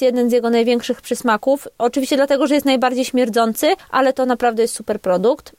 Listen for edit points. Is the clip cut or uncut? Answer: uncut